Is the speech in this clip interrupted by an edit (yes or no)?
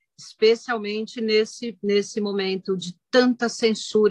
no